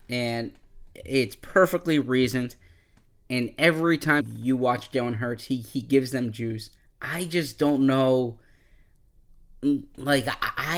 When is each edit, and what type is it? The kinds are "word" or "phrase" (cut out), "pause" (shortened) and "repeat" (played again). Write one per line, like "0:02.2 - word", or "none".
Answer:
0:04.2 - word
0:06.8 - pause